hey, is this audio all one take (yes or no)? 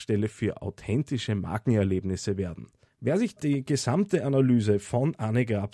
no